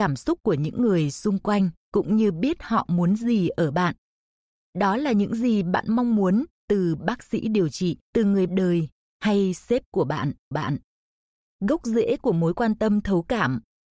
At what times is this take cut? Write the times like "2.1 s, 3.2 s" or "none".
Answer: 1.8 s, 8.0 s, 8.5 s, 10.5 s